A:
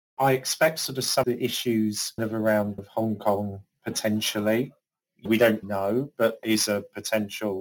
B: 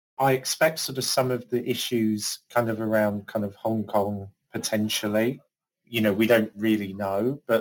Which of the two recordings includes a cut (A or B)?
A